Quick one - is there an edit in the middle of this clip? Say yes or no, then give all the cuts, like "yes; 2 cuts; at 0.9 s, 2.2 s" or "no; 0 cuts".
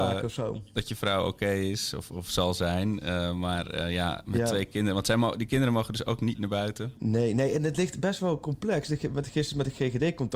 no; 0 cuts